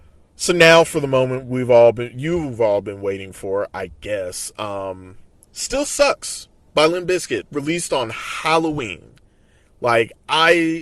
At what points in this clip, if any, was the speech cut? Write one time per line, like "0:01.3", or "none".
0:05.3
0:06.6
0:07.5